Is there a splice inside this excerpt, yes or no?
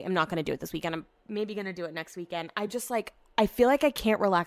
no